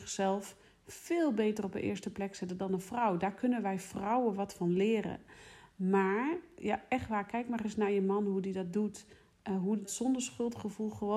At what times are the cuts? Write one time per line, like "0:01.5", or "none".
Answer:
0:09.8